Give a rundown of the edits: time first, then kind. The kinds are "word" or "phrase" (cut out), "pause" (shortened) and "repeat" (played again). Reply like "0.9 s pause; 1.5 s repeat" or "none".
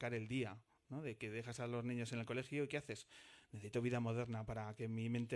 none